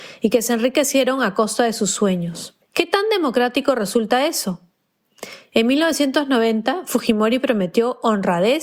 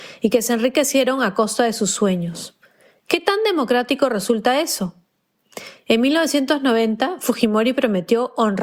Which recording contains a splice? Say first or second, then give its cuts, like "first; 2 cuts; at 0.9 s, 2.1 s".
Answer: first; 1 cut; at 2.6 s